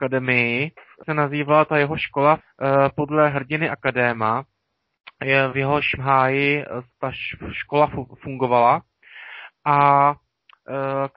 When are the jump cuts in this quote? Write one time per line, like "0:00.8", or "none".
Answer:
0:01.0
0:02.4
0:06.0